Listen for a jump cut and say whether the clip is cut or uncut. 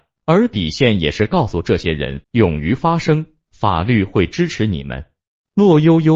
cut